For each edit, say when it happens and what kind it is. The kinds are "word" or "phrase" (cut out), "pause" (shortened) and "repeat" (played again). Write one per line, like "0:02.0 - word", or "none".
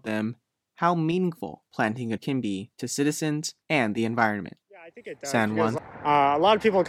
0:01.7 - pause
0:02.2 - word
0:02.7 - pause
0:03.6 - pause
0:04.6 - pause
0:05.8 - word